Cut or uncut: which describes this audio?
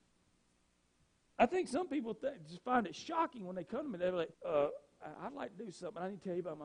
cut